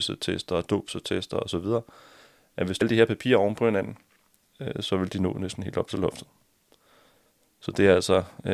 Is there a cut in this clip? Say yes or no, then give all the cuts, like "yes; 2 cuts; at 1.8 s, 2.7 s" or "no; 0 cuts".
yes; 1 cut; at 2.8 s